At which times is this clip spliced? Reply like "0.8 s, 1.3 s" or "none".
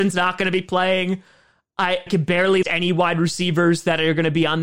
2.1 s, 2.6 s